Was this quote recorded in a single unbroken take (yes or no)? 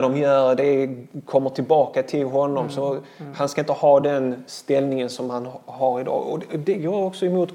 yes